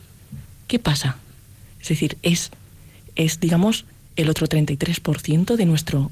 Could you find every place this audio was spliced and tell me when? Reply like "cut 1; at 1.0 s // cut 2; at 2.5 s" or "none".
none

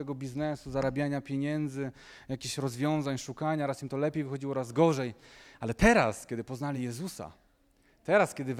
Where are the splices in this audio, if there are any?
none

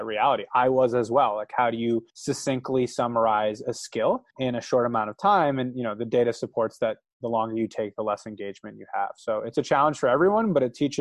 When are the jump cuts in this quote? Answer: cut 1; at 2.1 s // cut 2; at 4.3 s

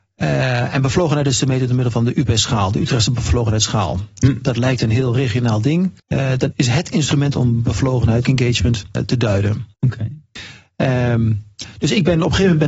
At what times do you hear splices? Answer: cut 1; at 6.0 s // cut 2; at 6.5 s // cut 3; at 7.3 s // cut 4; at 8.2 s // cut 5; at 9.0 s // cut 6; at 9.7 s

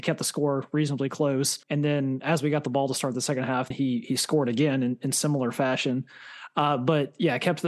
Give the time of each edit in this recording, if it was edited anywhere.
cut 1; at 1.6 s // cut 2; at 3.7 s

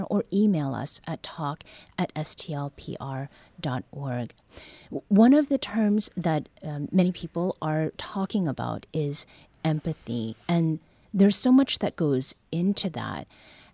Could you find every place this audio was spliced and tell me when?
none

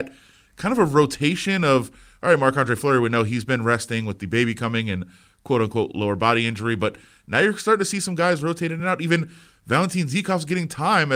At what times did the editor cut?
none

